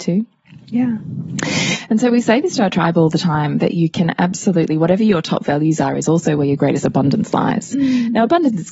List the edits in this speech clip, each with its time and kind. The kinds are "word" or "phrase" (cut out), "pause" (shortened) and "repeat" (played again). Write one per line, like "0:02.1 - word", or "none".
none

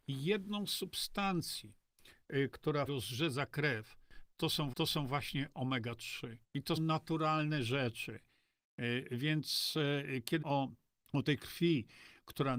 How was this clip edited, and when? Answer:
0:02.9 - word
0:04.7 - repeat
0:06.4 - pause
0:06.8 - word
0:10.4 - word
0:11.0 - pause
0:11.4 - word

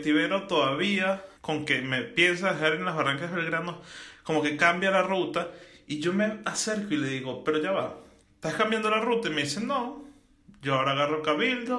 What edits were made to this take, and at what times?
0:01.4 - pause
0:08.2 - pause

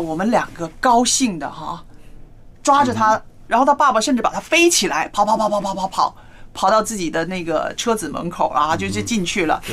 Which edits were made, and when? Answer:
0:02.5 - pause

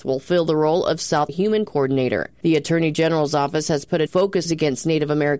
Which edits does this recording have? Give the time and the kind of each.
0:01.3 - word
0:01.6 - word
0:04.1 - word
0:04.4 - phrase

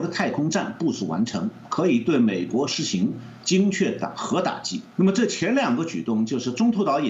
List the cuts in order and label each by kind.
0:04.9 - pause

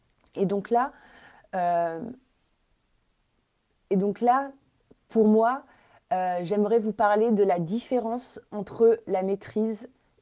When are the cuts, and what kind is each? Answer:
none

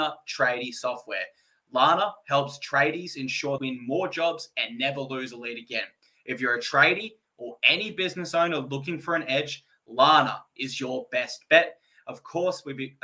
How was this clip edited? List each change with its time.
0:03.6 - word

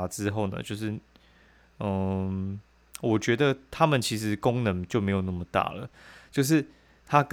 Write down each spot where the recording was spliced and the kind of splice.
none

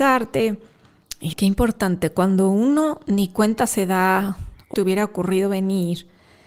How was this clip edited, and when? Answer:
0:01.3 - phrase
0:04.7 - phrase

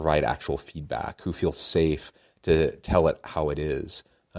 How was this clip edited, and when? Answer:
none

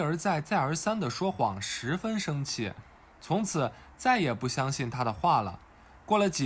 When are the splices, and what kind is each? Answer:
none

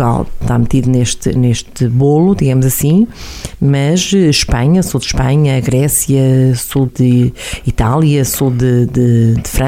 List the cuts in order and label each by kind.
0:06.9 - word

